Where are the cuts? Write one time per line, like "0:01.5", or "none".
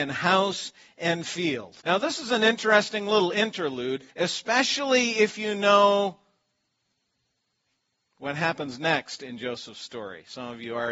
0:01.8
0:04.1